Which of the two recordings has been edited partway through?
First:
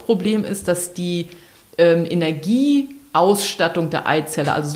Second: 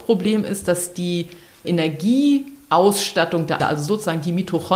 second; 2 cuts; at 1.6 s, 3.6 s

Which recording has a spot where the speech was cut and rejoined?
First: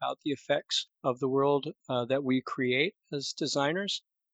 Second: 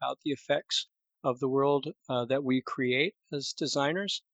first; 1 cut; at 1.0 s

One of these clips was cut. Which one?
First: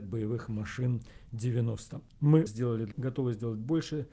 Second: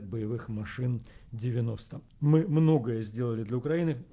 first; 2 cuts; at 2.5 s, 2.9 s

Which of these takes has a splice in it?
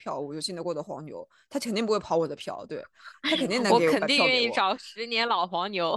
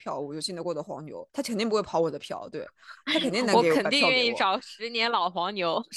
second; 1 cut; at 1.3 s

